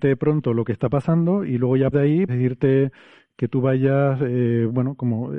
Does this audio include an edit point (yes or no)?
yes